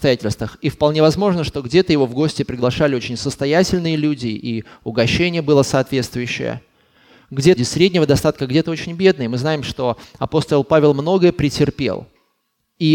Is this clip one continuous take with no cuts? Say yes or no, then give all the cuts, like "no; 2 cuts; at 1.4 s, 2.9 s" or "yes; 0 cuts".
no; 1 cut; at 7.6 s